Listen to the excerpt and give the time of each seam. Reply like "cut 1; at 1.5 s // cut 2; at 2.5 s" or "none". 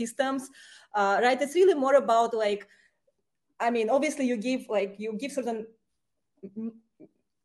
none